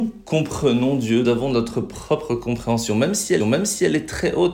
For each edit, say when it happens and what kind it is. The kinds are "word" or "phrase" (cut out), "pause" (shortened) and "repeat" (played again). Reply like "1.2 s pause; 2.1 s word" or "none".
1.2 s word; 3.4 s repeat